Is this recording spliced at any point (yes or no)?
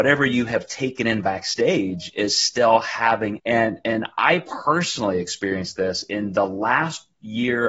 yes